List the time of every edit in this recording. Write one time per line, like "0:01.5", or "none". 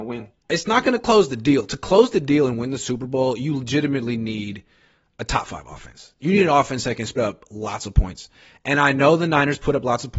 0:07.2